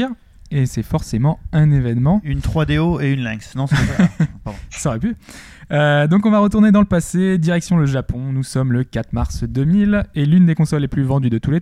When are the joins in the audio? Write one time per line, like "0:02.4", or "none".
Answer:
none